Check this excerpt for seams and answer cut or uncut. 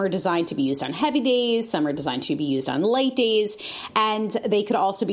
uncut